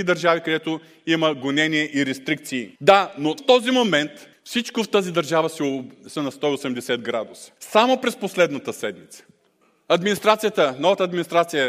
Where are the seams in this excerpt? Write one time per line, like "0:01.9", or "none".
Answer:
0:02.8
0:03.4
0:04.3
0:06.2
0:07.6
0:09.5